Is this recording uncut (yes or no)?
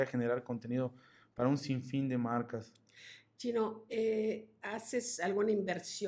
yes